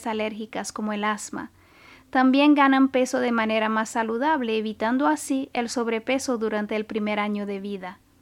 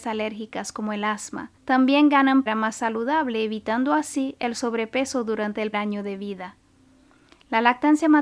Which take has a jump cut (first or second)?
second